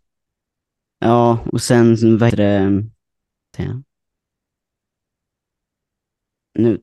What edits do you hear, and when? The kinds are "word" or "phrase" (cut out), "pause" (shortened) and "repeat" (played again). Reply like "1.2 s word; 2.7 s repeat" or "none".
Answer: 2.3 s word; 3.5 s phrase